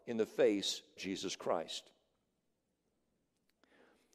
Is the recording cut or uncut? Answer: cut